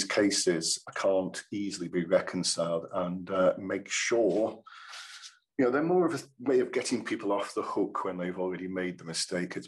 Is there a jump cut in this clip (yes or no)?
no